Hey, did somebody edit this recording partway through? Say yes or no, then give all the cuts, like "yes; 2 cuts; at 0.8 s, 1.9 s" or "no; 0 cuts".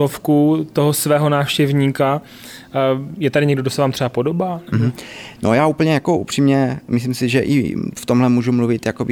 no; 0 cuts